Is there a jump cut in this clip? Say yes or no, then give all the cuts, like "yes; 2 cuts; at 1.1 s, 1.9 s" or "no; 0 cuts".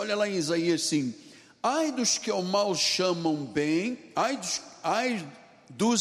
no; 0 cuts